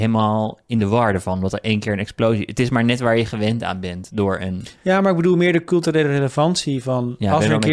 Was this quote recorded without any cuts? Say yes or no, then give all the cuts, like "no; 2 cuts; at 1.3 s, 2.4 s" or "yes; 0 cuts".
yes; 0 cuts